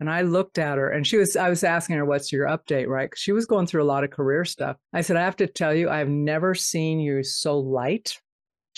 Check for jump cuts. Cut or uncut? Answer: cut